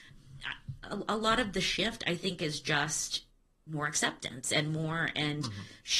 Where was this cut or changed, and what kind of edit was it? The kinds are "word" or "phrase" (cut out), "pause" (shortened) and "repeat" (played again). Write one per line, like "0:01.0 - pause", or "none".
none